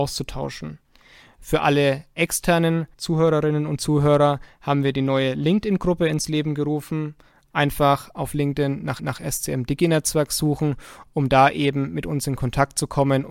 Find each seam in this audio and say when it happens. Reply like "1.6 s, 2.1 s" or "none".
2.9 s, 9.0 s

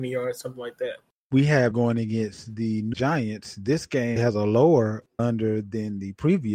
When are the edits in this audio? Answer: 1.7 s, 2.9 s, 4.2 s, 5.2 s

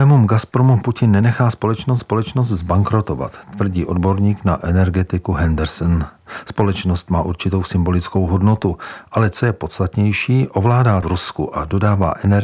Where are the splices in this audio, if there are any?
2.0 s, 11.0 s

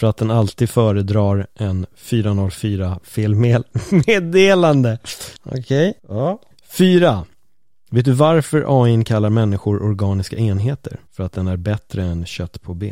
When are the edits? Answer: 5.4 s, 6.0 s, 6.5 s, 11.1 s

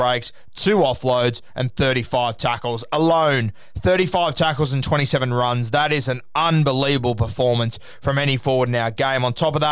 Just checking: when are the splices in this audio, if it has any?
none

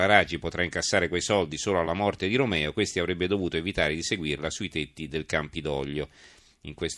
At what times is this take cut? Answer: none

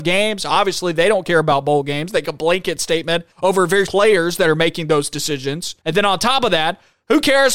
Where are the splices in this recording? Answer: 2.2 s, 3.3 s, 3.9 s, 5.8 s

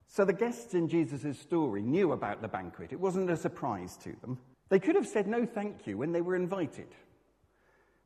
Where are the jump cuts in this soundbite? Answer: 4.5 s

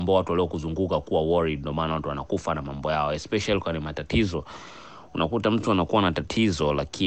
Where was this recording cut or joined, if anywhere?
none

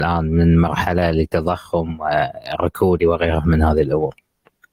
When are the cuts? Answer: 3.0 s

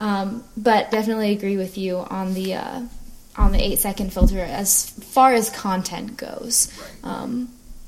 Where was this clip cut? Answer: 0.9 s, 3.3 s

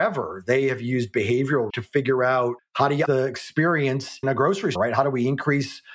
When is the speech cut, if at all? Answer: 1.7 s, 2.6 s, 3.1 s, 4.2 s, 4.7 s

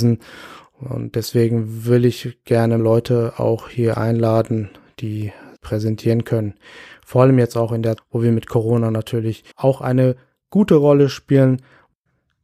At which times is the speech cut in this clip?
2.8 s, 5.6 s, 8.0 s, 9.5 s

